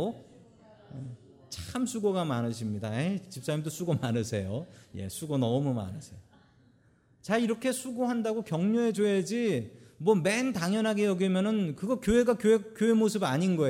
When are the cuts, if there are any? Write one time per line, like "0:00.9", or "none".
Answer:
none